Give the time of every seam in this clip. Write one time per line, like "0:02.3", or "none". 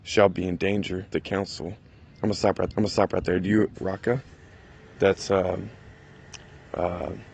0:01.1
0:02.7
0:03.8